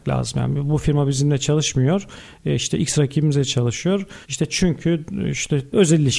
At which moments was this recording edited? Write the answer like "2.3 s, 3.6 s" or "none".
4.2 s

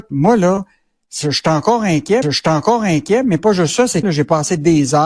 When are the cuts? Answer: 2.2 s, 4.0 s

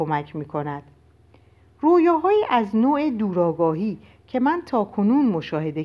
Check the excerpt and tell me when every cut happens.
none

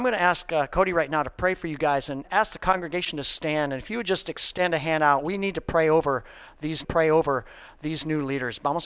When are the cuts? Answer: 2.2 s, 6.8 s

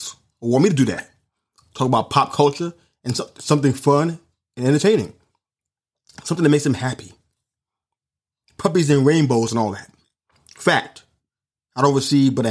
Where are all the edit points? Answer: none

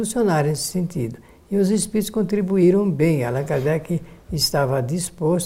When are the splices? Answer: none

